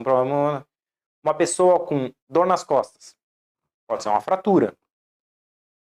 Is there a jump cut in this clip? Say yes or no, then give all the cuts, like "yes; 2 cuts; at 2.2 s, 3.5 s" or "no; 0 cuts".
yes; 1 cut; at 2.2 s